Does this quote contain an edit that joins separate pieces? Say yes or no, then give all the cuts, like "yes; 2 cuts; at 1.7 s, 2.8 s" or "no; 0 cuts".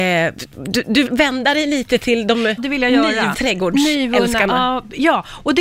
yes; 3 cuts; at 1.1 s, 2.6 s, 3.3 s